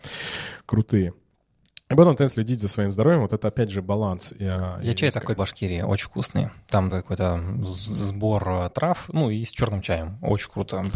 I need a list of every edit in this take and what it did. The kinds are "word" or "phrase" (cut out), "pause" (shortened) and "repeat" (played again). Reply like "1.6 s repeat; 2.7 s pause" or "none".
2.3 s word; 5.4 s phrase; 6.9 s word